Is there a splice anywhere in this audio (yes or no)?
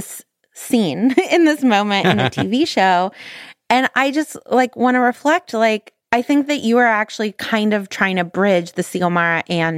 yes